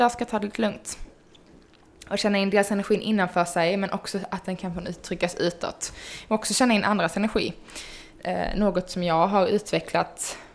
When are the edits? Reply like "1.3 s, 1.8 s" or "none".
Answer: none